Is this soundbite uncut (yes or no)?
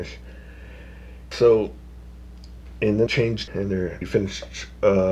no